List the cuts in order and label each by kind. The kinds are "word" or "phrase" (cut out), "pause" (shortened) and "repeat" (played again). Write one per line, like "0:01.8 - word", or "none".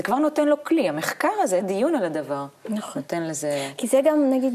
0:01.6 - word